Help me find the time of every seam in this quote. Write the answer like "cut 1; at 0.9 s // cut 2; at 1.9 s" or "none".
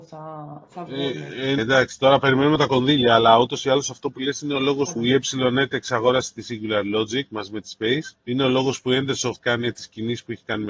cut 1; at 1.6 s // cut 2; at 5.0 s // cut 3; at 8.2 s // cut 4; at 9.4 s

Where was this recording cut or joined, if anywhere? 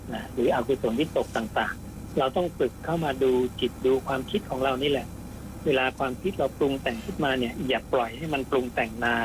cut 1; at 2.1 s

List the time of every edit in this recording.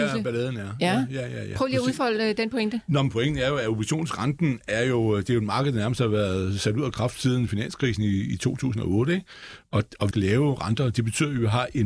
cut 1; at 10.1 s

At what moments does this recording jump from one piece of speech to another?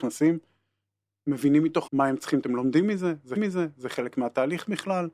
cut 1; at 1.9 s // cut 2; at 2.4 s // cut 3; at 3.4 s

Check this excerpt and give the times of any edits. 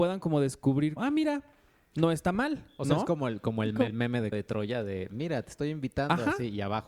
cut 1; at 1.0 s // cut 2; at 3.9 s // cut 3; at 4.3 s

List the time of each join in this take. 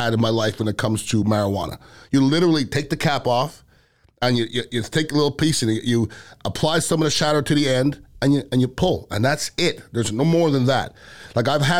none

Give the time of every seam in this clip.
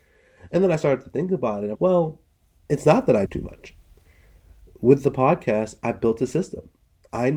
cut 1; at 1.7 s // cut 2; at 3.3 s

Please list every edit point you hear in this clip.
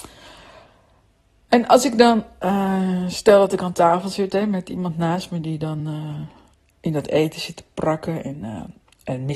none

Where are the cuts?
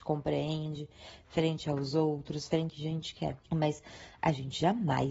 cut 1; at 2.7 s // cut 2; at 3.4 s

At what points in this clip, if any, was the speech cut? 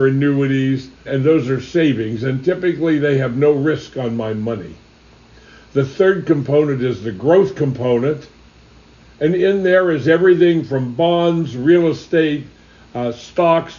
cut 1; at 1.0 s

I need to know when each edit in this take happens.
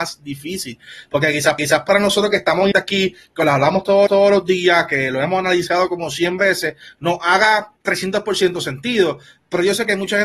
cut 1; at 1.6 s // cut 2; at 2.7 s // cut 3; at 4.1 s // cut 4; at 7.8 s

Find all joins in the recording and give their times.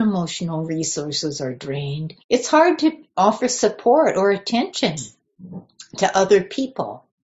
cut 1; at 2.2 s

